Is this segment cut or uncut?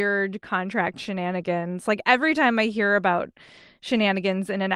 uncut